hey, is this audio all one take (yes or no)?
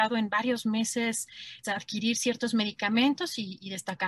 no